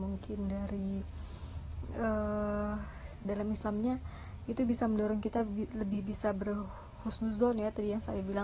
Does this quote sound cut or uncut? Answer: cut